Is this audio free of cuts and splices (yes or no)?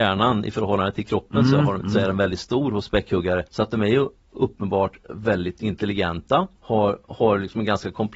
no